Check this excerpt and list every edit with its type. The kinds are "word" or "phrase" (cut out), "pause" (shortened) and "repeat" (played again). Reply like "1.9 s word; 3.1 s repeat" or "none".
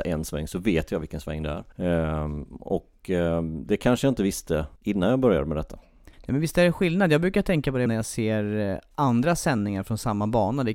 1.7 s pause; 4.8 s pause; 6.1 s pause; 7.9 s word